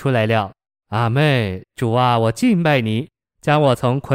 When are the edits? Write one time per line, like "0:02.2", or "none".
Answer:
none